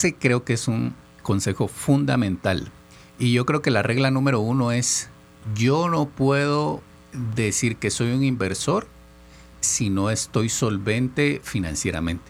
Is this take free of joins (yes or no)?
no